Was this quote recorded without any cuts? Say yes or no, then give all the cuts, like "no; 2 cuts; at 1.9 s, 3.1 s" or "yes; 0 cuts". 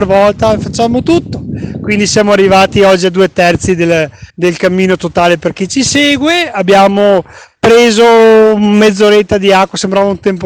no; 1 cut; at 4.3 s